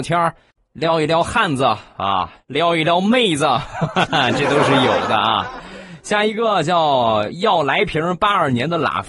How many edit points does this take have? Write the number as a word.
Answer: one